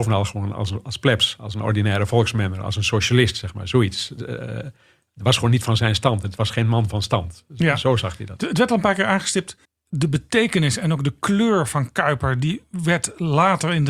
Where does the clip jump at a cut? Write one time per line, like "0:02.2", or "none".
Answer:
0:09.6